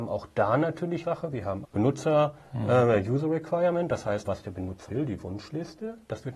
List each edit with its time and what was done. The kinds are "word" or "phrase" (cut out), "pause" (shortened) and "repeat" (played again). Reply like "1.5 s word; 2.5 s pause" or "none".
1.0 s word; 1.6 s word; 4.2 s word; 4.9 s word